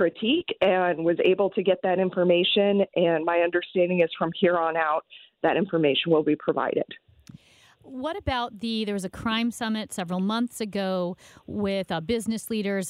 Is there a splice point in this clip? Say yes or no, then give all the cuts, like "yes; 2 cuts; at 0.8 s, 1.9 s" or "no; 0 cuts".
no; 0 cuts